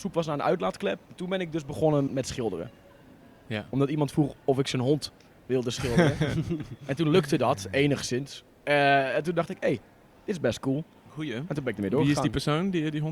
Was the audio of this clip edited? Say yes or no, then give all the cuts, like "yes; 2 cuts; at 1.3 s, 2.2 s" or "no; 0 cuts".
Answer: yes; 2 cuts; at 1.0 s, 2.1 s